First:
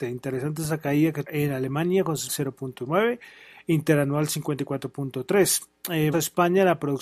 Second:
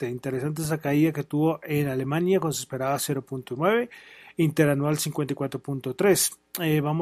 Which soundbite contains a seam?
first; 3 cuts; at 1.2 s, 2.3 s, 6.1 s

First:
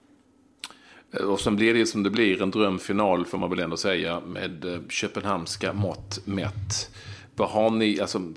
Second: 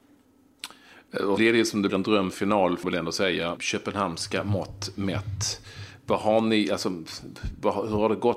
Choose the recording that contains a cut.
second; 4 cuts; at 1.4 s, 1.9 s, 2.8 s, 3.6 s

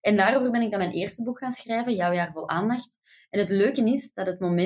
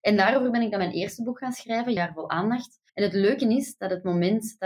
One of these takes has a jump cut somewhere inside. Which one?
second; 2 cuts; at 2.0 s, 2.9 s

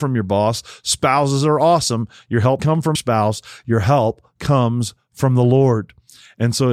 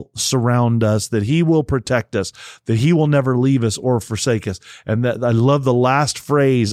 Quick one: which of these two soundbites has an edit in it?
first; 2 cuts; at 2.6 s, 2.9 s

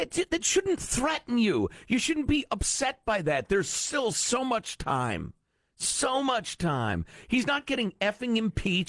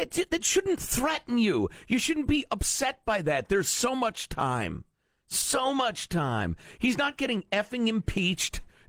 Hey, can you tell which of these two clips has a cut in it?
second; 1 cut; at 3.6 s

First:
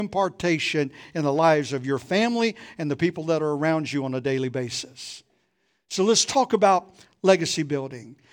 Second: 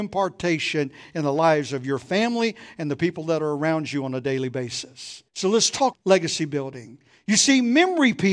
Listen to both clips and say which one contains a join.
second; 2 cuts; at 5.3 s, 5.9 s

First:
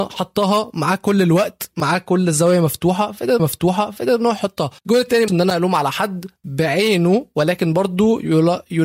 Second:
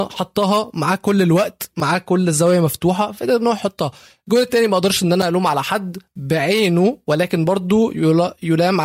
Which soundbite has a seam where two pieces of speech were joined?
first; 3 cuts; at 3.4 s, 4.8 s, 5.3 s

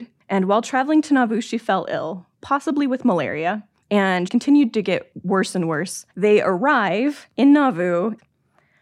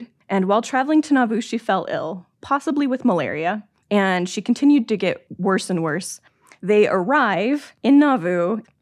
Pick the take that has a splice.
first; 2 cuts; at 4.3 s, 6.1 s

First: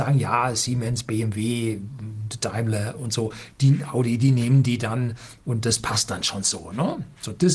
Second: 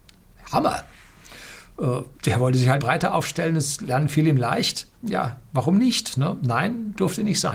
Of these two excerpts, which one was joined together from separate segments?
second; 3 cuts; at 2.1 s, 2.8 s, 4.9 s

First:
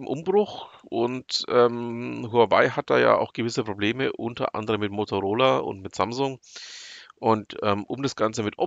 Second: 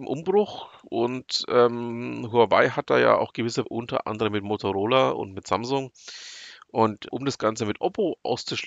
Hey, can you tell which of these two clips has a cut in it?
second; 2 cuts; at 3.6 s, 7.1 s

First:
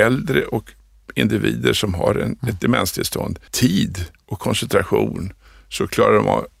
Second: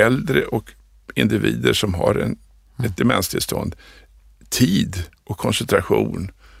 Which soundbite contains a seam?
first; 2 cuts; at 2.4 s, 3.5 s

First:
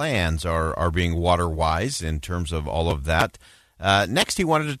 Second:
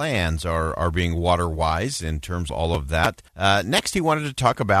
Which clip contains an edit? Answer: second; 2 cuts; at 2.5 s, 3.3 s

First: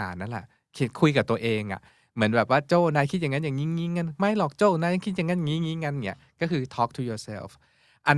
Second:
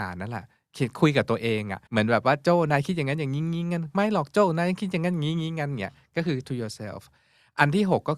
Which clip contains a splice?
second; 2 cuts; at 1.9 s, 6.4 s

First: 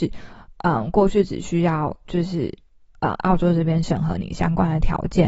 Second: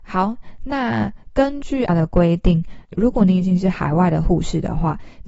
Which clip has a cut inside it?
second; 1 cut; at 1.9 s

